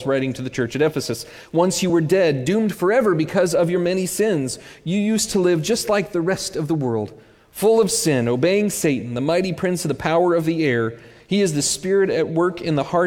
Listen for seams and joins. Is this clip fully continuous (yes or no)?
yes